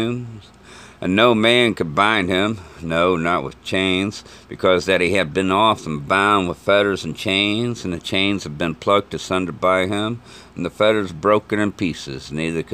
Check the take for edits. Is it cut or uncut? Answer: uncut